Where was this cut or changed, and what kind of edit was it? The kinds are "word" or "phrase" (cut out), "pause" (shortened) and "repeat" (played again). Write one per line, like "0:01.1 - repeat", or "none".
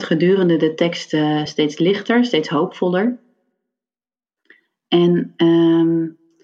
none